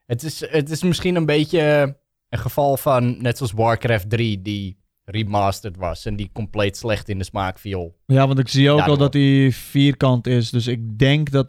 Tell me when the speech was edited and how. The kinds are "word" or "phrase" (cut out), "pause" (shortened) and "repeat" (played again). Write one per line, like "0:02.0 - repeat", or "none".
none